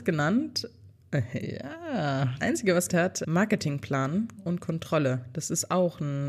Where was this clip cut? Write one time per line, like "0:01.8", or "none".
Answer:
0:02.4
0:02.9
0:04.4